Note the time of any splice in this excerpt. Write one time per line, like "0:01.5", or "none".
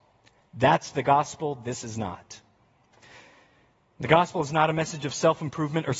none